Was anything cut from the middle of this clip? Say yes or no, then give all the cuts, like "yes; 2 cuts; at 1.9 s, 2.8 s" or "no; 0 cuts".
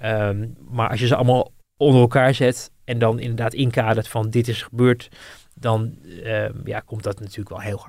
no; 0 cuts